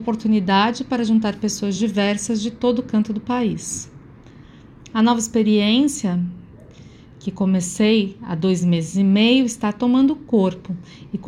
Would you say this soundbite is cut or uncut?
uncut